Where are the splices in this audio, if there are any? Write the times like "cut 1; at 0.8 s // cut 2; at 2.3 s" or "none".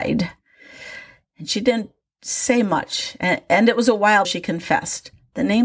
cut 1; at 4.2 s